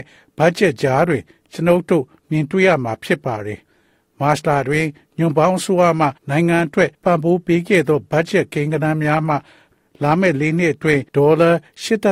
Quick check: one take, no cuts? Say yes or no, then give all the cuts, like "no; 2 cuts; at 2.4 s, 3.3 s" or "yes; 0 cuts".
no; 3 cuts; at 6.2 s, 6.9 s, 11.1 s